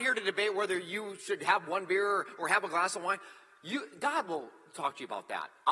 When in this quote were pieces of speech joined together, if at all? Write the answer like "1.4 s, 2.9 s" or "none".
none

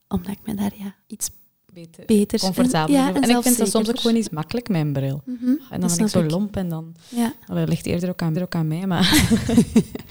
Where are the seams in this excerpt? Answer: 1.0 s, 4.2 s, 8.3 s

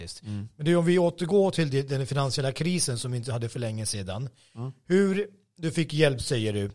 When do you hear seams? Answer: none

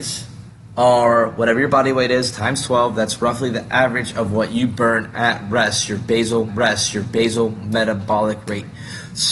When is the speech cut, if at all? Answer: 6.5 s

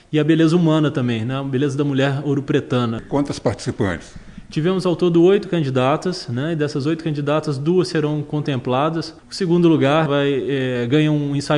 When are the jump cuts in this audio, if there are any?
9.2 s, 10.1 s

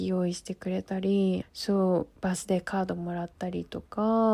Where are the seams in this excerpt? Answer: 1.4 s, 2.2 s

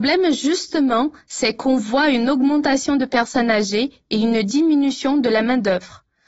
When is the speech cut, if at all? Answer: none

